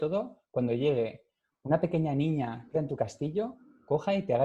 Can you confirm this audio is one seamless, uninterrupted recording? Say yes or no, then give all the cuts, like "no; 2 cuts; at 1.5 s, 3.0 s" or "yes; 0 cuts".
no; 1 cut; at 2.7 s